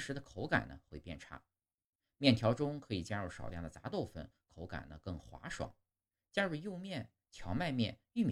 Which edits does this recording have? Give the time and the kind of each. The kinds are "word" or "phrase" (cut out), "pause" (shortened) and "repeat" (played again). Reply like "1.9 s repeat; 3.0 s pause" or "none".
none